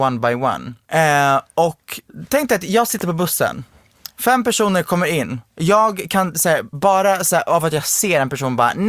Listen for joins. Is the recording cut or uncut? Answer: uncut